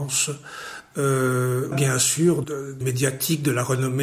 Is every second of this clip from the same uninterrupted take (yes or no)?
no